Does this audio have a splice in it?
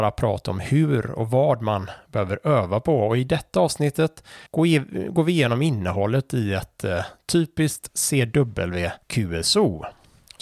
yes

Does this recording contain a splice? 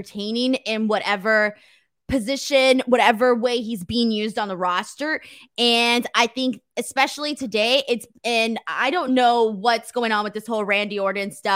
no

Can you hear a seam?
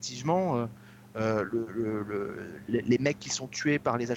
no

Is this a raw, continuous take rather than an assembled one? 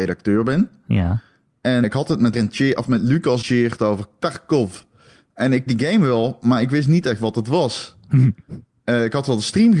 no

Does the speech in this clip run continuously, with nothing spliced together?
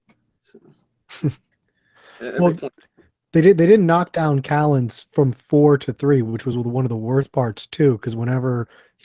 yes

